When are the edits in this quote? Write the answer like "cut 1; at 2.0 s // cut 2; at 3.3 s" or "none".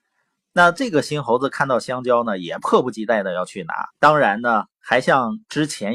cut 1; at 3.9 s